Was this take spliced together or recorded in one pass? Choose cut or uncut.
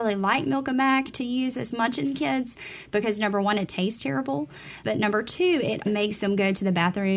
cut